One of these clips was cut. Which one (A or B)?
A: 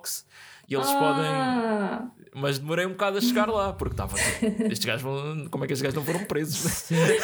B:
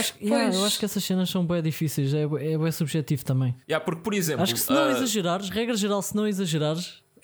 B